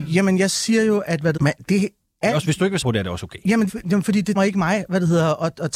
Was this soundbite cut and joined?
yes; 5 cuts; at 1.4 s, 1.7 s, 2.8 s, 3.7 s, 4.4 s

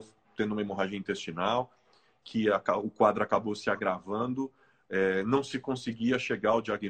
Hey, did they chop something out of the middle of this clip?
no; 0 cuts

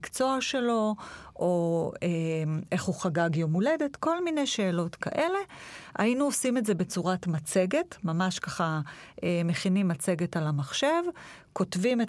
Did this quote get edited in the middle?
no; 0 cuts

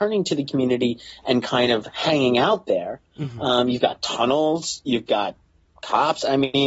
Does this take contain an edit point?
no; 0 cuts

